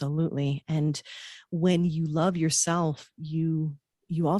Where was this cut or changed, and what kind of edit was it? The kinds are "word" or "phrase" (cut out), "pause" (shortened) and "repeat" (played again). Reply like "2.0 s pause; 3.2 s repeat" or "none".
none